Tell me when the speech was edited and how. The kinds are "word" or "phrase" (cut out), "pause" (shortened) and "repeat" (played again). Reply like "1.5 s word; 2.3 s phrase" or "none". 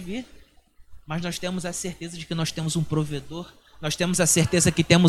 none

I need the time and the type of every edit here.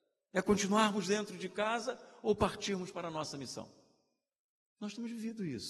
none

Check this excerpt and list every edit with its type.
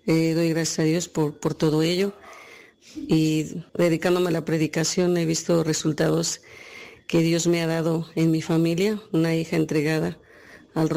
3.7 s pause

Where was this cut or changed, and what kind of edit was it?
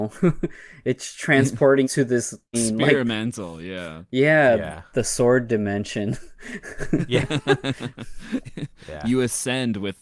1.8 s word; 2.5 s word

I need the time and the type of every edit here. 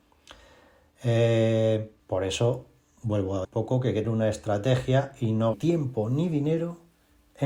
2.0 s pause; 3.4 s phrase; 4.0 s word; 5.5 s phrase

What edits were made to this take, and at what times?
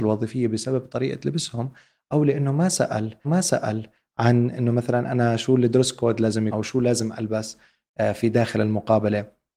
3.2 s repeat; 6.5 s word

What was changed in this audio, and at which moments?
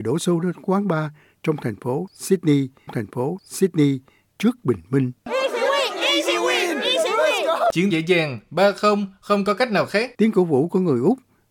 2.9 s repeat; 5.2 s pause; 7.9 s word; 10.1 s pause

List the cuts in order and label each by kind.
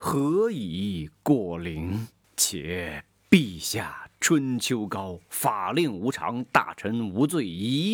2.2 s pause

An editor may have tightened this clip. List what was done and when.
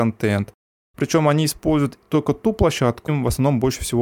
3.1 s word

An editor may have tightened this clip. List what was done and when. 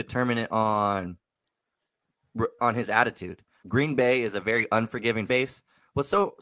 2.6 s word; 3.6 s word; 5.3 s word

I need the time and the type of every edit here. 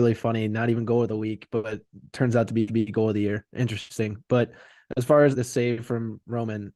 2.7 s repeat; 5.3 s word

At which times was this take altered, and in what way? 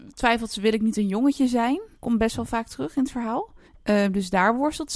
1.9 s pause; 3.7 s pause

